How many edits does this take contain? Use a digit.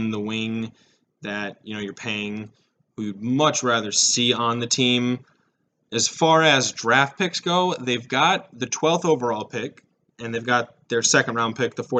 0